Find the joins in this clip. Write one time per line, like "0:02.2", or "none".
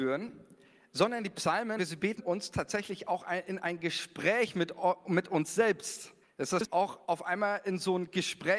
0:01.8
0:02.2
0:06.2
0:07.0